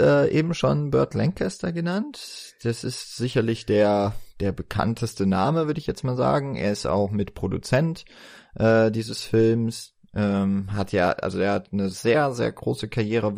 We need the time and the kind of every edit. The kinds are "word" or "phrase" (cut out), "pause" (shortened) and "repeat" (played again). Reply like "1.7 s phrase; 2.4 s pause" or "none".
none